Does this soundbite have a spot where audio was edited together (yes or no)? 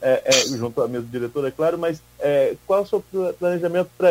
no